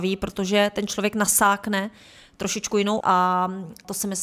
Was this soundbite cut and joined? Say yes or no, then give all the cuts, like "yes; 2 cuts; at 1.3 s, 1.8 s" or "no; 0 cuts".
yes; 1 cut; at 3.0 s